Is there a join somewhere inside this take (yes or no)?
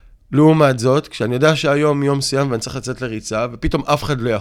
no